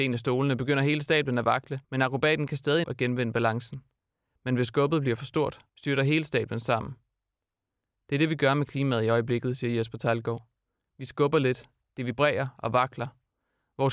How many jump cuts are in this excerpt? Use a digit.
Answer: 3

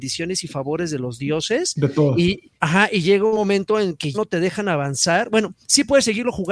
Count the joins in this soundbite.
2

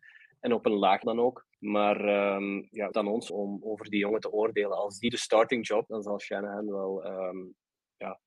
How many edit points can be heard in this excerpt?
6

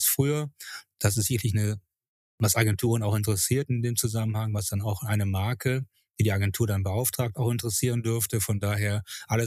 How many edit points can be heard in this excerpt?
0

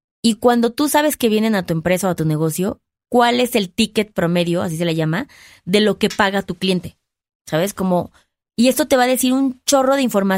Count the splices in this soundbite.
0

